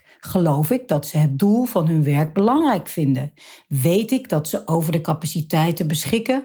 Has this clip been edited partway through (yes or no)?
no